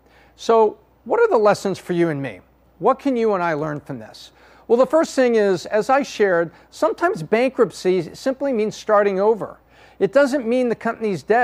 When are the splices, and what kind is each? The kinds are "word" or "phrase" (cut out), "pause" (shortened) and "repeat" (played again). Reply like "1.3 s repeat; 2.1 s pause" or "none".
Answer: none